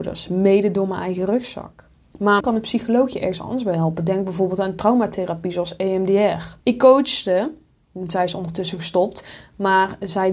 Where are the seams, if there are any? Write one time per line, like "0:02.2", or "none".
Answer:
0:02.4
0:06.6